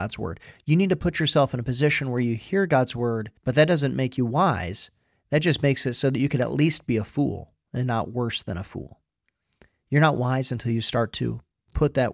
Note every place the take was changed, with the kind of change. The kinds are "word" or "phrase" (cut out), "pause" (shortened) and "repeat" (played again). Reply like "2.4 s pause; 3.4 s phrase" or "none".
3.4 s pause